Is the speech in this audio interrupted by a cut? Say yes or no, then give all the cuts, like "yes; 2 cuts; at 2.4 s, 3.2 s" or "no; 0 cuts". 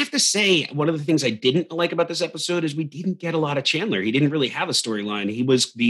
no; 0 cuts